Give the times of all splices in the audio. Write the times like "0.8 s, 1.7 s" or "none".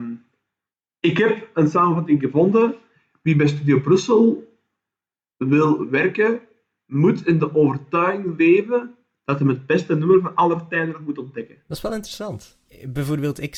none